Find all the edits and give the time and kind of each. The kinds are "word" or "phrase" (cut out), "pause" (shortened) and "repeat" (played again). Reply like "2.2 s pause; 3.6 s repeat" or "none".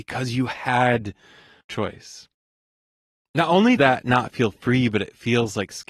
1.6 s word; 3.8 s word